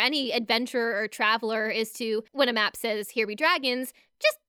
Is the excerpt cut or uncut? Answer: cut